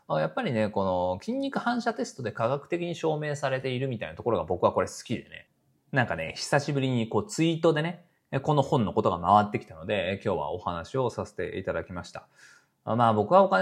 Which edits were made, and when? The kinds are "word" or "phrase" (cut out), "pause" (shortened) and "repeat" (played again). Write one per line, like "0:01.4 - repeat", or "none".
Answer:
none